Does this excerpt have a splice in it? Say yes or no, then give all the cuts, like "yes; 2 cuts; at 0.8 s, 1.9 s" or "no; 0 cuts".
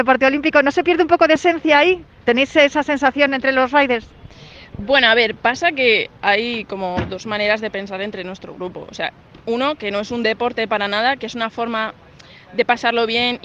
no; 0 cuts